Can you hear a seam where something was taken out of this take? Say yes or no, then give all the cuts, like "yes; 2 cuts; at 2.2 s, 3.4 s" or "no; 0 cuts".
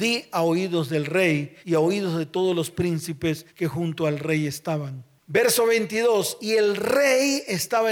yes; 2 cuts; at 1.6 s, 3.5 s